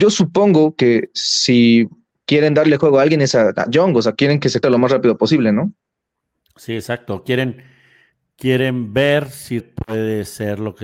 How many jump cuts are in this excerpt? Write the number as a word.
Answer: two